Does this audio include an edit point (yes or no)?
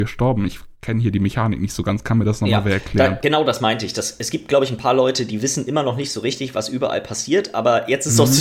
no